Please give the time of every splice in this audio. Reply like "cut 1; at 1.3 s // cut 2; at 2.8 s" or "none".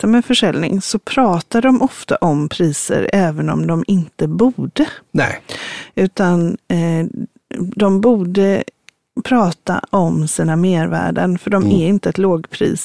none